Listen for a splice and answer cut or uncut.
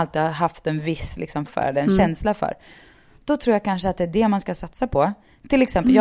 cut